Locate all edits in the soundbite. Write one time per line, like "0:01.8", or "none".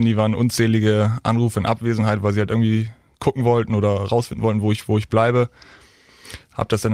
none